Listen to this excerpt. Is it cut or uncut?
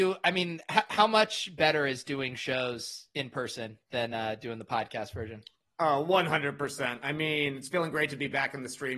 uncut